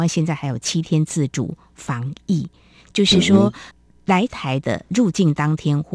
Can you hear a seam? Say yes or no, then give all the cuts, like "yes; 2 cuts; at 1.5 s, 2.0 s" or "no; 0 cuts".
no; 0 cuts